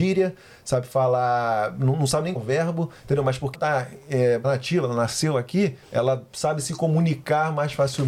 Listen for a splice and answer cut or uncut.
cut